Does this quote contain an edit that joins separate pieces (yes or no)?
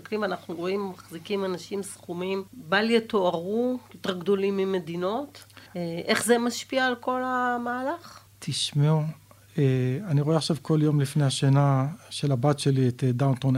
yes